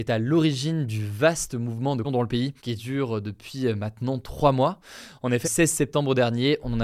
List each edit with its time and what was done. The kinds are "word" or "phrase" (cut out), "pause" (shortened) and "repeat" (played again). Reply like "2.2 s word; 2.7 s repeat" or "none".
2.0 s word; 2.6 s pause; 5.4 s word